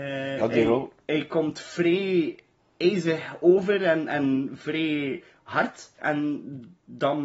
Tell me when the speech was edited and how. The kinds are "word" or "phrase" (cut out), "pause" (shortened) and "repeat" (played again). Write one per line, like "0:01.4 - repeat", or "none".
0:02.6 - pause
0:05.9 - pause